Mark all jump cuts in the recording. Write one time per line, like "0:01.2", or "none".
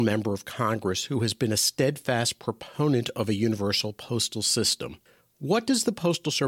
none